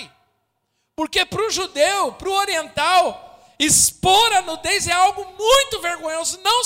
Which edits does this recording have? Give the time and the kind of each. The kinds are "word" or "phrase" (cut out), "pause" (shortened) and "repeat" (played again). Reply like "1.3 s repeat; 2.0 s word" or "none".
none